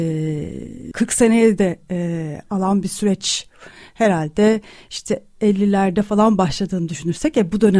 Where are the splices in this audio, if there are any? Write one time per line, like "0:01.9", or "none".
0:00.9